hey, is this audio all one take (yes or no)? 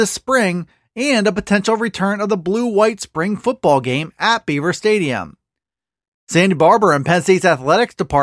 yes